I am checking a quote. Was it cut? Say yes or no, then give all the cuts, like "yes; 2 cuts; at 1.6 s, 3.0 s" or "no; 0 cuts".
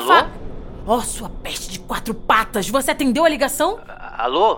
no; 0 cuts